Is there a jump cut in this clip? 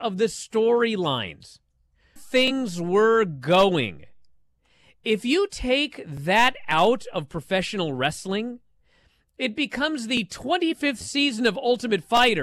yes; 1 cut; at 2.2 s

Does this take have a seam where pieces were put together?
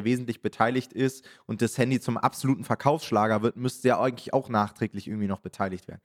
no; 0 cuts

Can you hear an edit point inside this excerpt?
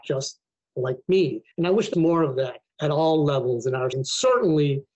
yes; 4 cuts; at 1.5 s, 1.9 s, 2.7 s, 3.9 s

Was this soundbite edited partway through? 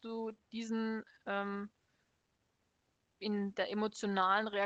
no; 0 cuts

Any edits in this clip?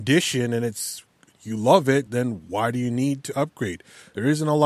no; 0 cuts

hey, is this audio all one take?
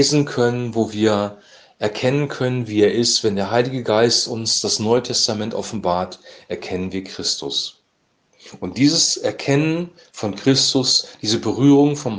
yes; 0 cuts

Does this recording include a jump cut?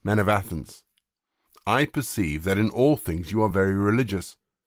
no; 0 cuts

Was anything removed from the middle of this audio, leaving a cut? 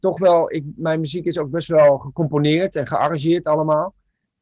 no; 0 cuts

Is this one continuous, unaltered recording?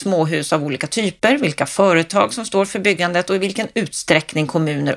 yes; 0 cuts

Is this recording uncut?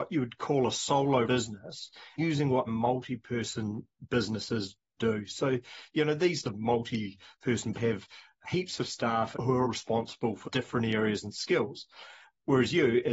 no; 9 cuts; at 1.2 s, 2.2 s, 2.7 s, 5.0 s, 6.4 s, 7.7 s, 9.3 s, 9.6 s, 10.4 s

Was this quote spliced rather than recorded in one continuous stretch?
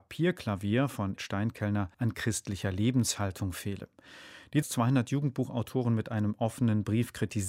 yes; 3 cuts; at 1.2 s, 1.9 s, 4.6 s

